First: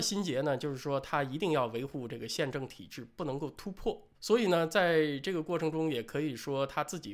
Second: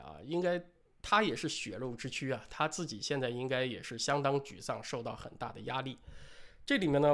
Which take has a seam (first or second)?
first